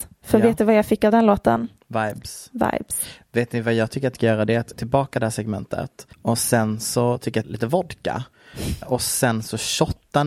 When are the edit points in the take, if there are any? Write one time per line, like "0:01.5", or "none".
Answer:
0:04.1
0:04.7
0:06.1
0:07.4
0:08.8

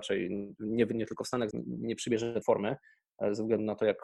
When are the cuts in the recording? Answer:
0:01.5
0:02.4

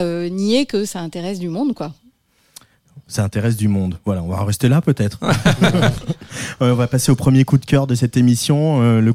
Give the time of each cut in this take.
none

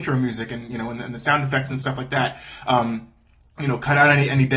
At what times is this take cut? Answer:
none

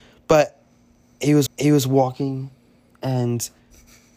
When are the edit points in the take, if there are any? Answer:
0:01.5

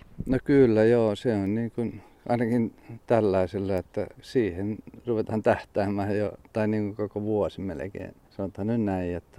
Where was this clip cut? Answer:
0:04.1
0:08.2

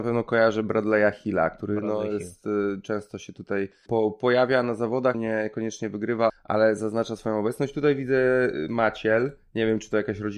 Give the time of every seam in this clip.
0:03.9
0:05.1
0:06.3

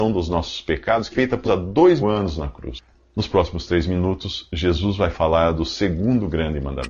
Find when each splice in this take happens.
0:01.1
0:01.4
0:02.0

